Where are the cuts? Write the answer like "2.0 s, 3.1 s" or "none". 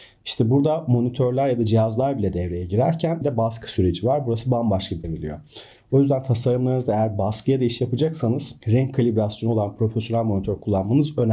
3.2 s, 5.0 s